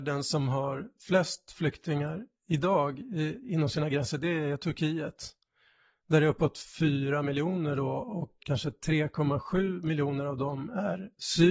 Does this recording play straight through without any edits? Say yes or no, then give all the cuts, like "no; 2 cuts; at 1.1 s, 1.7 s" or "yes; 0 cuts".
no; 1 cut; at 8.4 s